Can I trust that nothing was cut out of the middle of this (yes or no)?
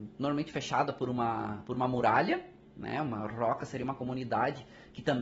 yes